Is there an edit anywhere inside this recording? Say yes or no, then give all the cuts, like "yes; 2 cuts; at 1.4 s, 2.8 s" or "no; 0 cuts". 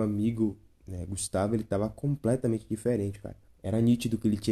yes; 1 cut; at 3.5 s